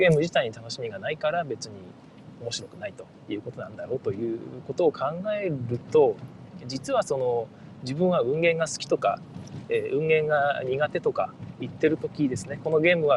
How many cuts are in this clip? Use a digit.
1